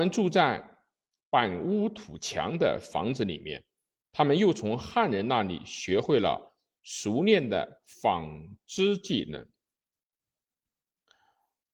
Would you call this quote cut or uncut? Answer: uncut